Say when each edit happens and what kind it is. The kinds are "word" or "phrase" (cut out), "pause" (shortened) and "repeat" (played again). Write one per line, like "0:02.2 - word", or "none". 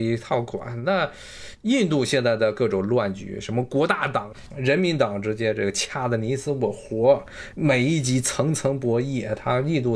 0:07.5 - phrase